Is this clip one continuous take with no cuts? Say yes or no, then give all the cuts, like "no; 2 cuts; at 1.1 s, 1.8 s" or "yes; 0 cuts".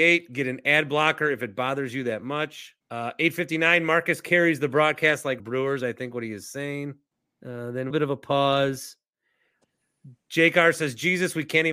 no; 4 cuts; at 2.8 s, 5.4 s, 7.1 s, 7.9 s